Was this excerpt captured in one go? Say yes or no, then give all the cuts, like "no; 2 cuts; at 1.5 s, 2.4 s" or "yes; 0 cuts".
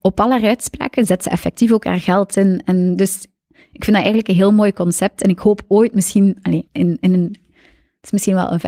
no; 1 cut; at 6.7 s